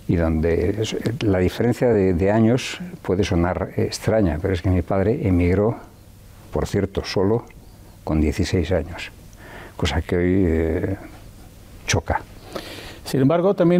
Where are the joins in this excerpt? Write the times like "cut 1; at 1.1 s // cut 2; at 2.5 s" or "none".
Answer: none